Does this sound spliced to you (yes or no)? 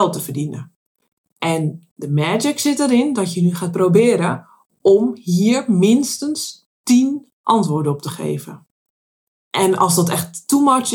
no